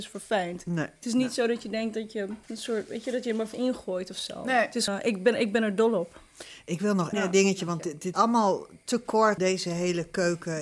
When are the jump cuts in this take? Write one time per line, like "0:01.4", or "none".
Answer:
0:02.4
0:03.5
0:04.9
0:07.1
0:08.1
0:09.4